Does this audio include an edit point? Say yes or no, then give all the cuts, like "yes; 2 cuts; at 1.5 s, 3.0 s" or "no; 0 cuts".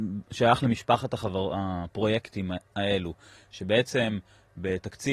no; 0 cuts